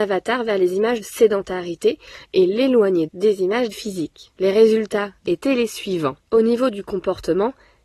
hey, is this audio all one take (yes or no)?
no